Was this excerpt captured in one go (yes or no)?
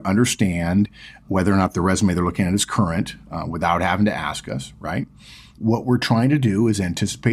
yes